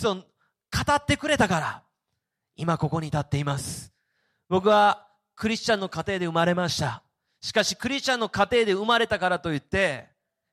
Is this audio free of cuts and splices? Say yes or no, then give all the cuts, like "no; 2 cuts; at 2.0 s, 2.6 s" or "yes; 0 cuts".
yes; 0 cuts